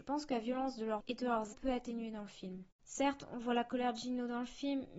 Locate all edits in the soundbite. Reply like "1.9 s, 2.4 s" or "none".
1.0 s, 1.5 s, 2.7 s